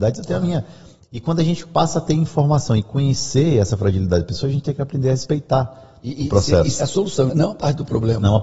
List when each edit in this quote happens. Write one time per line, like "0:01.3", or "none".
0:06.8
0:07.3